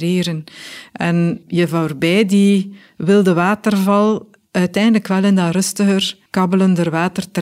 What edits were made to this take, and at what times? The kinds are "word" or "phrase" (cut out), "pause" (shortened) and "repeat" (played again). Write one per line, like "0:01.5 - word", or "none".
0:01.4 - word
0:06.3 - pause